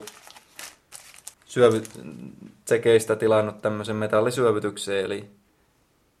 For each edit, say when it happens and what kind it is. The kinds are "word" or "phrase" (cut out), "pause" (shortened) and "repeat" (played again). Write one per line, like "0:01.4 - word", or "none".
0:01.3 - pause